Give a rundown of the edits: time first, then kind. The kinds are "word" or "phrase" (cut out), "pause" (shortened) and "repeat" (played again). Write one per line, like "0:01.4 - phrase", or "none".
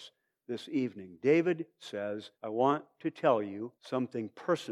0:02.3 - pause
0:03.8 - pause